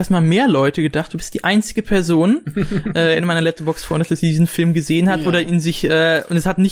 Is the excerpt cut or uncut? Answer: uncut